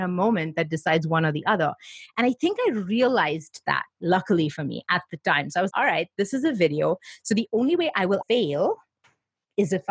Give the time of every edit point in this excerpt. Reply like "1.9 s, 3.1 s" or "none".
5.7 s, 8.2 s